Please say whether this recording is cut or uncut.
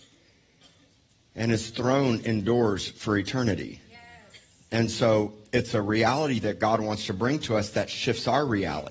uncut